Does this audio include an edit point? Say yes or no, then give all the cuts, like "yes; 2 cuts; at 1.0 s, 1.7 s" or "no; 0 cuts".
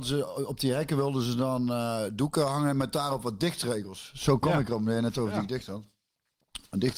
no; 0 cuts